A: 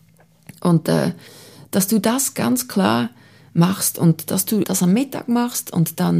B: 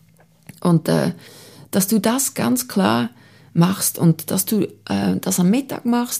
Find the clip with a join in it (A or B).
A